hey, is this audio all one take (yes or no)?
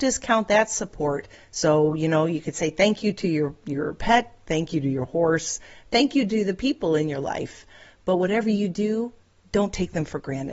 yes